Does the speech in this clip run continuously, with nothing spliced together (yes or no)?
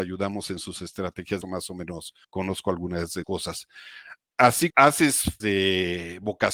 no